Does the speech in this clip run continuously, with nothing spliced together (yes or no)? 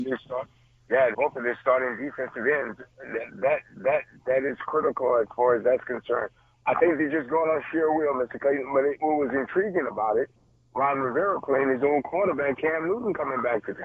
no